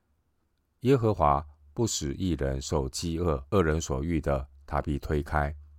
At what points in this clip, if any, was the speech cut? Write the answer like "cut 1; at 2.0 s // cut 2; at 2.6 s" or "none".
cut 1; at 3.5 s

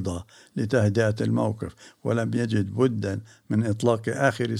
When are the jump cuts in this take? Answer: none

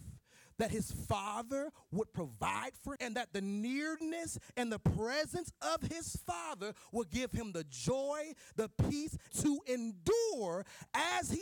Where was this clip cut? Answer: cut 1; at 3.0 s // cut 2; at 9.3 s

